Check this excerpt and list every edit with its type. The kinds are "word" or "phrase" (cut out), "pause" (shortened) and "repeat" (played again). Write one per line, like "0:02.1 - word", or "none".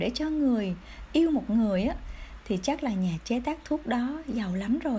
none